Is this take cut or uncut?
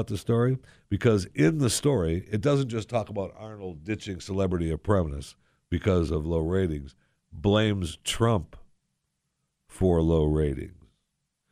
uncut